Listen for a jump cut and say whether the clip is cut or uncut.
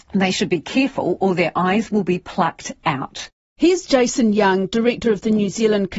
uncut